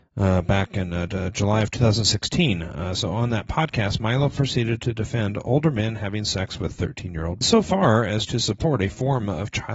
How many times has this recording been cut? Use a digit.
1